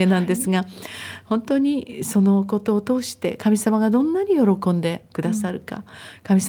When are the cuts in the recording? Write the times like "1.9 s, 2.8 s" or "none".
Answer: none